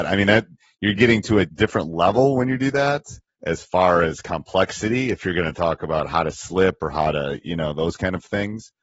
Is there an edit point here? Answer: yes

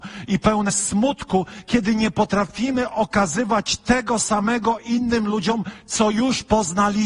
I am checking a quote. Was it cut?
no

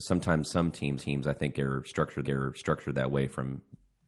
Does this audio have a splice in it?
yes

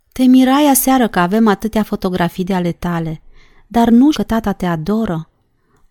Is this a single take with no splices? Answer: no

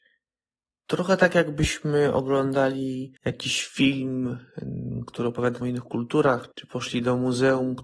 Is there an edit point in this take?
yes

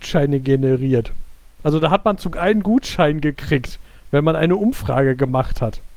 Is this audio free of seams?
no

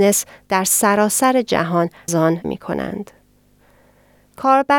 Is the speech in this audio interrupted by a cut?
yes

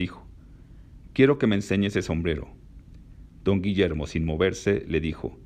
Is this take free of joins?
yes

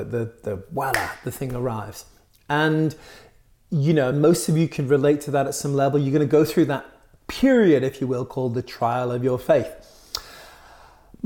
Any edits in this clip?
no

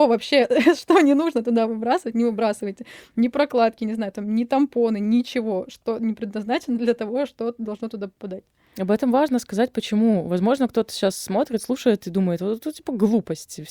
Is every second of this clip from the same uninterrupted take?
yes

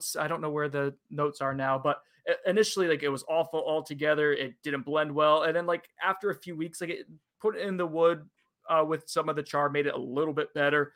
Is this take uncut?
yes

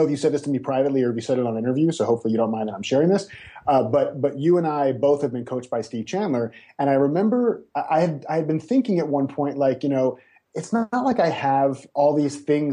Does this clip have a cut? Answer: no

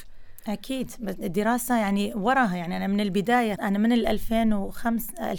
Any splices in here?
yes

